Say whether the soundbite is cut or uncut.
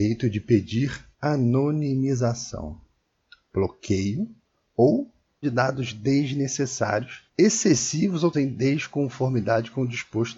cut